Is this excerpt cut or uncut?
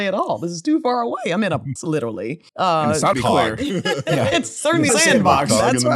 cut